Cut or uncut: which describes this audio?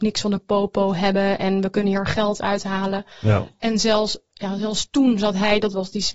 uncut